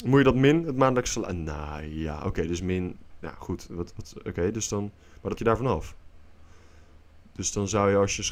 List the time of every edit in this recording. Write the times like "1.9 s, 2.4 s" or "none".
5.4 s